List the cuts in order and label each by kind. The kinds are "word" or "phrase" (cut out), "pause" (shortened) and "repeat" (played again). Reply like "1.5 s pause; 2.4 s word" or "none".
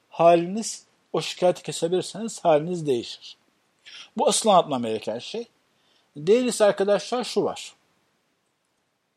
none